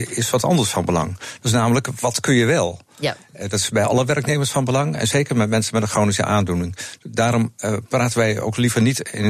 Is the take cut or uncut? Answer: uncut